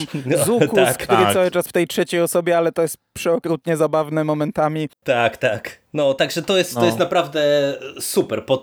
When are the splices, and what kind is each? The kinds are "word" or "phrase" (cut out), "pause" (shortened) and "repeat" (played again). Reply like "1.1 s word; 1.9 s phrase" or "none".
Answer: 1.7 s word; 5.9 s pause